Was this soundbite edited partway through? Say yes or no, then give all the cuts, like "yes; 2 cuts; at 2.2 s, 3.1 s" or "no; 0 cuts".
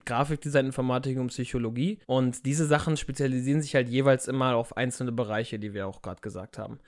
yes; 1 cut; at 2.0 s